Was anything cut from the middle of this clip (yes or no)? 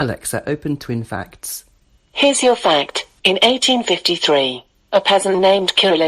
yes